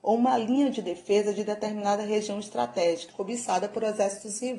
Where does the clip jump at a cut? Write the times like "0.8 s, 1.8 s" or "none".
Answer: 3.1 s